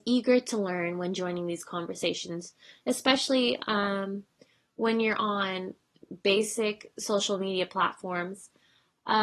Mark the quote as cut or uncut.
uncut